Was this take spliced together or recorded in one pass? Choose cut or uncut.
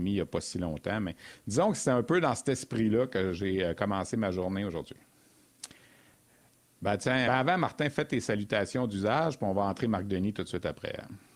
cut